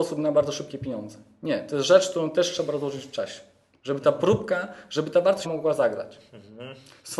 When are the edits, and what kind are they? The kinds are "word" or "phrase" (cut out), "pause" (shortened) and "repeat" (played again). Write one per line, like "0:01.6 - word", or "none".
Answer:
0:05.4 - word